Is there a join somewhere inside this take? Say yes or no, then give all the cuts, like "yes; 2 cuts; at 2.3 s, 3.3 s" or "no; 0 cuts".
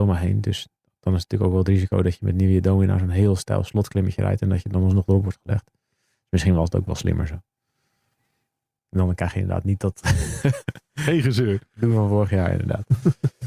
no; 0 cuts